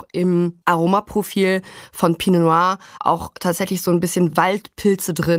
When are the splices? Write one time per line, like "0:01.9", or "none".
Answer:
none